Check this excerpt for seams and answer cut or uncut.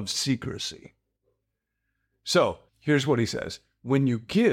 cut